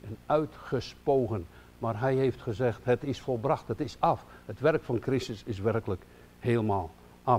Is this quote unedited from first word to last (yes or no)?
yes